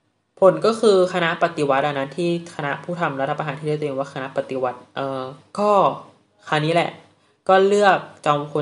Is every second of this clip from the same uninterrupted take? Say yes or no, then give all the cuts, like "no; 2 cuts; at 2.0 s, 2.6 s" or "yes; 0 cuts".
yes; 0 cuts